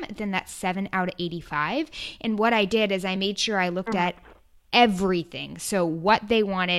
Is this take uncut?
yes; 0 cuts

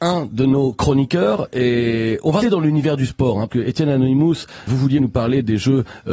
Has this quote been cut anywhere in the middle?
yes; 4 cuts; at 2.4 s, 3.5 s, 4.7 s, 5.0 s

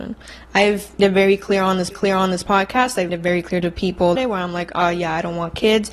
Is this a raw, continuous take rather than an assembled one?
no; 4 cuts; at 1.0 s, 1.9 s, 3.1 s, 4.2 s

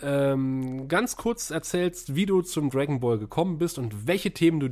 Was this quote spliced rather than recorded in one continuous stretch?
no; 0 cuts

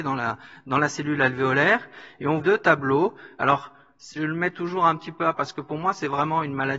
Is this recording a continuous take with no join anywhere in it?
no; 3 cuts; at 2.4 s, 4.2 s, 5.3 s

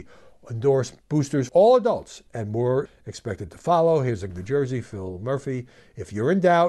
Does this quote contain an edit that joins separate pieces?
yes; 3 cuts; at 1.5 s, 2.9 s, 4.3 s

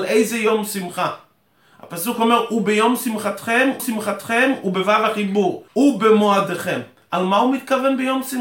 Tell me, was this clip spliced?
yes; 2 cuts; at 3.8 s, 5.7 s

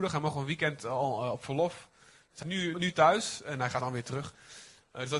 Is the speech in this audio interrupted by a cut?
yes; 3 cuts; at 2.4 s, 2.7 s, 3.8 s

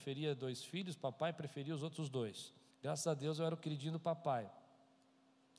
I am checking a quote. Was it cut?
yes; 1 cut; at 2.7 s

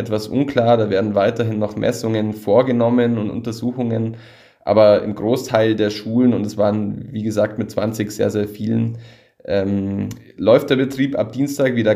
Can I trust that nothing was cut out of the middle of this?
yes; 0 cuts

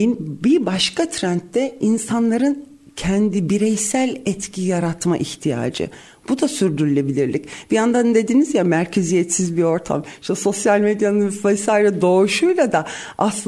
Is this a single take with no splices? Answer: yes; 0 cuts

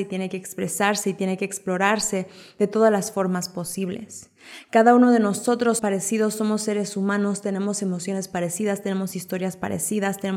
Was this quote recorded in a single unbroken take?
no; 1 cut; at 5.8 s

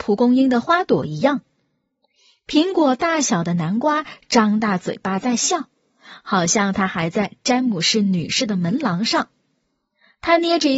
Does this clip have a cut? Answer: no; 0 cuts

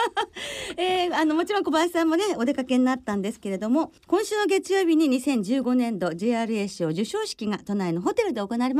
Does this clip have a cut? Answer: yes; 1 cut; at 4.0 s

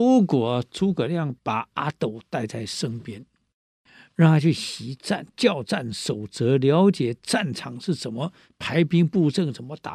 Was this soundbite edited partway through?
yes; 1 cut; at 1.4 s

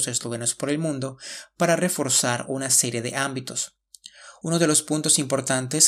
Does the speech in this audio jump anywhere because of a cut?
no; 0 cuts

